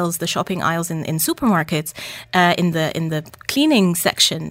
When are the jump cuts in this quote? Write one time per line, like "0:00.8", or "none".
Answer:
none

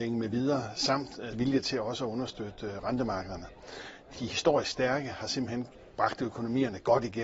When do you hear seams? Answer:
0:01.3
0:04.2

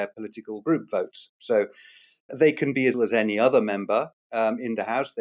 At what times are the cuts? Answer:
0:02.3
0:02.9

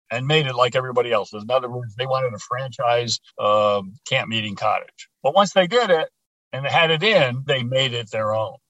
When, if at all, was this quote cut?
0:03.3
0:05.1
0:07.5

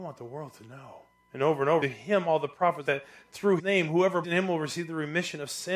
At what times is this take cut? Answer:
0:01.2
0:01.8
0:02.9
0:03.6
0:04.2

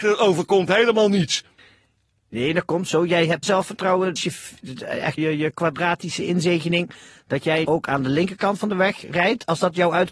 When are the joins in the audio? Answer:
0:02.9
0:03.4
0:04.2
0:05.2
0:07.6

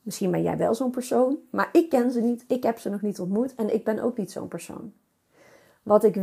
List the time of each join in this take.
none

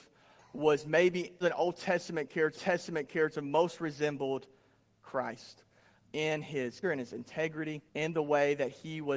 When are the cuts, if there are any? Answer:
0:01.4
0:02.5
0:06.0
0:06.8
0:07.9

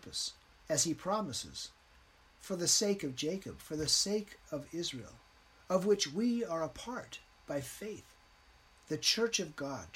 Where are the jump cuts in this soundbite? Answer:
none

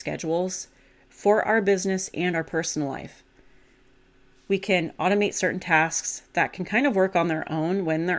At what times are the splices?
none

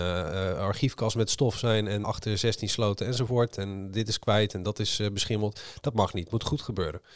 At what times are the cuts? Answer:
0:02.0

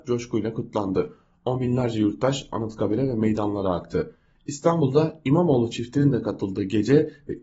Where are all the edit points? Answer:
none

